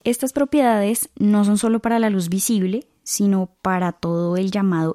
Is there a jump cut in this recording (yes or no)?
no